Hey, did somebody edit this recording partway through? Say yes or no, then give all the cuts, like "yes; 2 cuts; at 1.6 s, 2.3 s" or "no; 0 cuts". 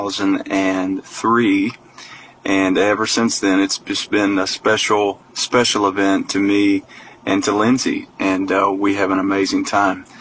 no; 0 cuts